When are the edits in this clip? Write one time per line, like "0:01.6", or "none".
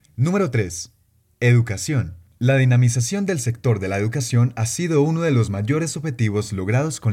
none